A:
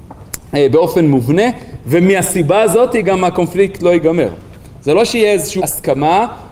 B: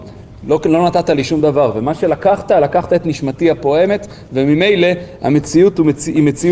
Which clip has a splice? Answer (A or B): A